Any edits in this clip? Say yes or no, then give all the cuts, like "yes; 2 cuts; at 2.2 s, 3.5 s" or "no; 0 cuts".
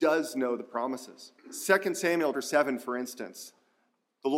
yes; 2 cuts; at 1.4 s, 2.3 s